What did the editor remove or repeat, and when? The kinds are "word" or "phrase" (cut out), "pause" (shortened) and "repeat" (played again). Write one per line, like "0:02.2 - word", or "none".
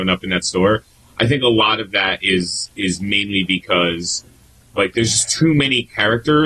none